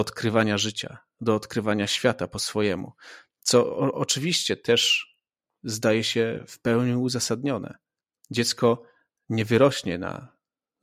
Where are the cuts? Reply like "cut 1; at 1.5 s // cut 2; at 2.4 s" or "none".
none